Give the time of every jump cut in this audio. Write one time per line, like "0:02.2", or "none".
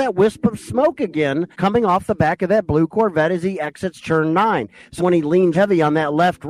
0:01.5
0:05.0
0:05.5

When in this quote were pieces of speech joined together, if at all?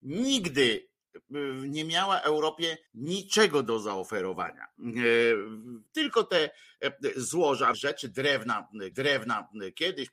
0:02.9
0:05.9
0:07.7
0:08.9

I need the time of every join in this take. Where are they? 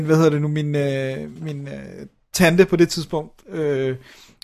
none

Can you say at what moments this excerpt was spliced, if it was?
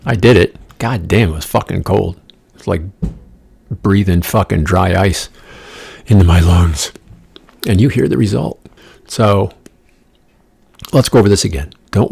none

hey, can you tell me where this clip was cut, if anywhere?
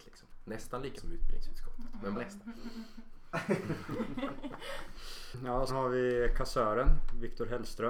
0:01.0
0:02.1
0:05.7

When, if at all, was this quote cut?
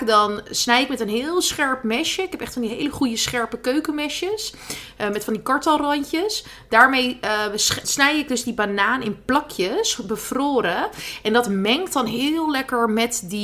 0:07.8

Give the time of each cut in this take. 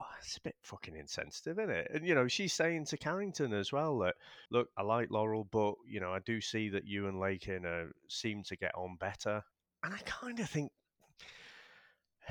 0:04.5
0:08.0
0:09.5

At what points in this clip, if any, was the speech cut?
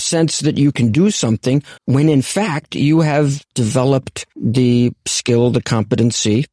0:01.8
0:03.5

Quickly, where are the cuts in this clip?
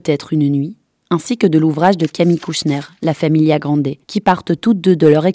0:04.0

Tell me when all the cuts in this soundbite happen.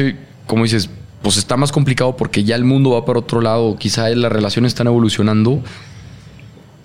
none

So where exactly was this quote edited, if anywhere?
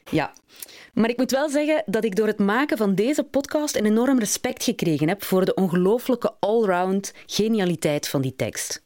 none

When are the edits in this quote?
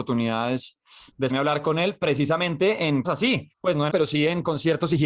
0:01.3
0:03.0
0:03.5
0:03.9

